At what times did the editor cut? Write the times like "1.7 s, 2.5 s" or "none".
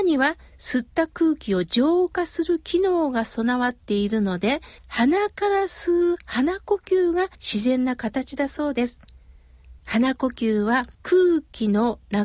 4.8 s, 7.3 s, 9.8 s, 10.9 s